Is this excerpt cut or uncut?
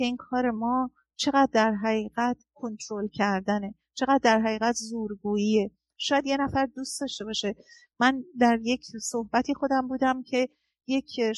uncut